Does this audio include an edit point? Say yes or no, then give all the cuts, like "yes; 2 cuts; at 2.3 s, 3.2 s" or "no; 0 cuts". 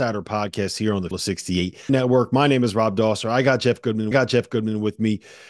yes; 3 cuts; at 1.1 s, 1.9 s, 4.1 s